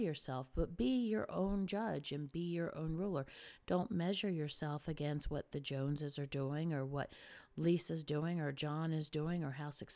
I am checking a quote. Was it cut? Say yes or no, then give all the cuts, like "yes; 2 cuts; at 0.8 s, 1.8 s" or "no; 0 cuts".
no; 0 cuts